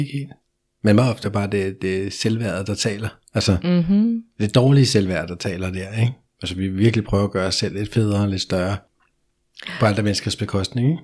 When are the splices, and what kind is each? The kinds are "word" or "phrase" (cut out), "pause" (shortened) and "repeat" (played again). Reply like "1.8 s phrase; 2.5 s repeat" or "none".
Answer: 1.2 s word

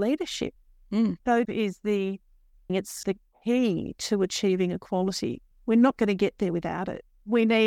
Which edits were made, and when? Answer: 1.4 s phrase; 2.7 s word; 3.0 s word; 5.5 s pause

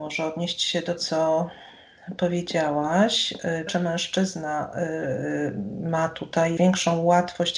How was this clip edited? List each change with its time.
1.0 s word; 3.7 s phrase; 6.6 s word

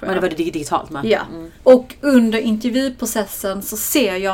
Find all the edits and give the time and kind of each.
1.6 s pause

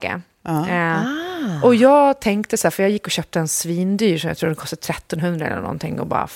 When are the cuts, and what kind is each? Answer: none

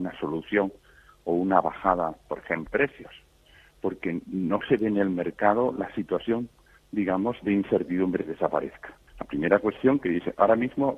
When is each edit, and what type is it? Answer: 2.7 s word; 9.1 s pause

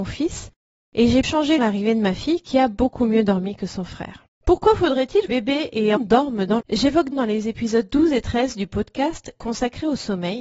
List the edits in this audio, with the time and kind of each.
1.2 s word; 1.6 s phrase; 4.3 s pause; 5.3 s phrase; 6.0 s word; 6.6 s phrase; 7.1 s phrase

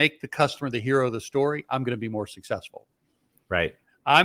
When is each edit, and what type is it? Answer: none

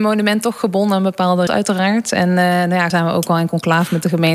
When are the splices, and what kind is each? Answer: 1.5 s word; 2.9 s phrase

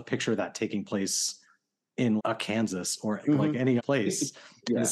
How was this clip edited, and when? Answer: 2.2 s word; 3.2 s word; 3.8 s word

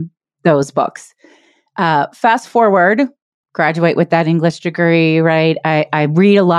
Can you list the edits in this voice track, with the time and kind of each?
none

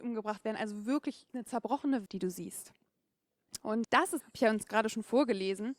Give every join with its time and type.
1.3 s word; 2.1 s word; 3.8 s word; 4.2 s word

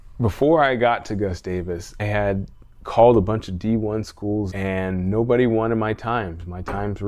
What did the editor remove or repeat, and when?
2.0 s word; 4.5 s word

